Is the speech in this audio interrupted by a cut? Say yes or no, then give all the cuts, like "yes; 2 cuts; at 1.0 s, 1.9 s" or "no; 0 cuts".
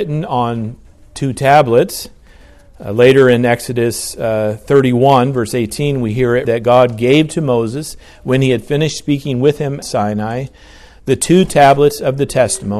yes; 2 cuts; at 6.4 s, 9.8 s